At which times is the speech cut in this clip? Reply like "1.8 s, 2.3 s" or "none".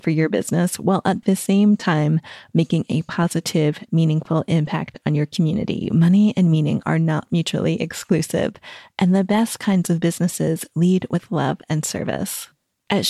none